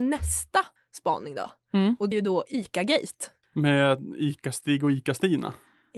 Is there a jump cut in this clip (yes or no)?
yes